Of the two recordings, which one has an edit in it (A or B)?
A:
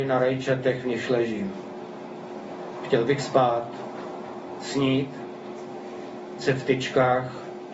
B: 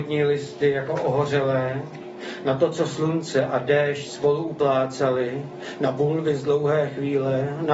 A